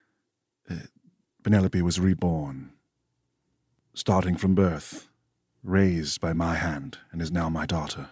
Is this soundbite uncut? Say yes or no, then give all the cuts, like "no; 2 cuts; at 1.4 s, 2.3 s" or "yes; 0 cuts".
yes; 0 cuts